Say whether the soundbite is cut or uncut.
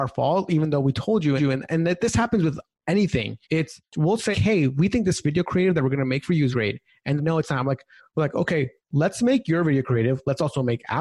cut